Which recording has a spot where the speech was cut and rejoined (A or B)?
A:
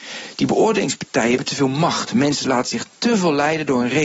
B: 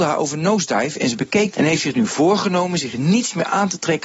B